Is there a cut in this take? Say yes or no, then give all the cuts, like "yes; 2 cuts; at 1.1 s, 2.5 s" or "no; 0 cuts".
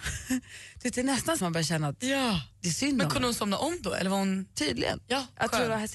yes; 1 cut; at 1.4 s